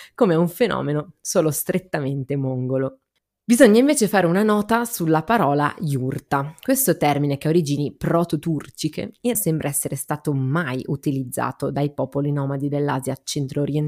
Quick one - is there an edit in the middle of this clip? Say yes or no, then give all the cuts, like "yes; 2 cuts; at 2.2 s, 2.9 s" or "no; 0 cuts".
yes; 1 cut; at 9.3 s